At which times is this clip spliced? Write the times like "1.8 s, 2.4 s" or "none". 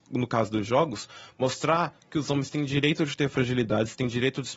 none